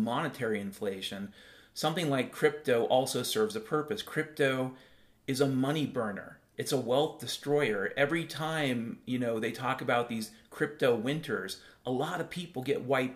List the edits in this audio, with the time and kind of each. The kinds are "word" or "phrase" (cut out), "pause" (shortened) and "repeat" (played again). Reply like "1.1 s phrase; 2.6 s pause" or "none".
none